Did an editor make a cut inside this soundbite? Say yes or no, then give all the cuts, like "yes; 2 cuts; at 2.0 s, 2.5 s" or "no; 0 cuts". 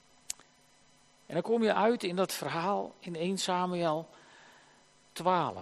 no; 0 cuts